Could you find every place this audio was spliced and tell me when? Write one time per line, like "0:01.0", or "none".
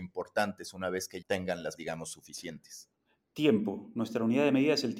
0:01.2
0:01.8
0:03.0